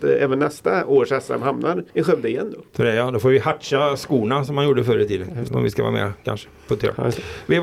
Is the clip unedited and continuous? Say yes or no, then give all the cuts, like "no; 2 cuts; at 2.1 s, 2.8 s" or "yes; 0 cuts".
no; 2 cuts; at 1.9 s, 2.7 s